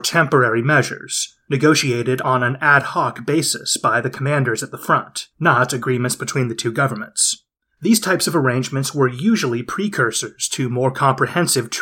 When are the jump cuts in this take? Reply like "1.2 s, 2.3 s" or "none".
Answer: 5.3 s, 7.6 s